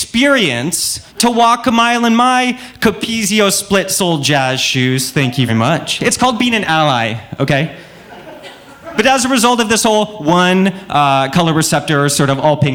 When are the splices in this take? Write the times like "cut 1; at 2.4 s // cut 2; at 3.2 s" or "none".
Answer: cut 1; at 1.1 s // cut 2; at 5.5 s